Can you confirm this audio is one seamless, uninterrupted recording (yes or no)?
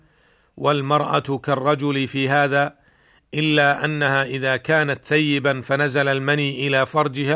yes